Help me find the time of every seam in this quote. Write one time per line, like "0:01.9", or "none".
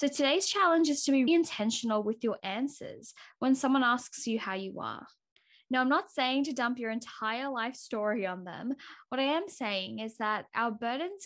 0:01.3